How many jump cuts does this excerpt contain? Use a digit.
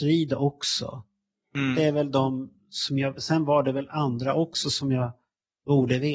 0